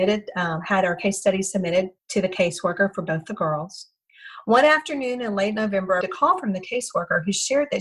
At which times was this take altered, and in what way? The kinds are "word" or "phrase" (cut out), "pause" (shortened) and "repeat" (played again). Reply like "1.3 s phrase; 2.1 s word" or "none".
2.0 s pause; 6.0 s word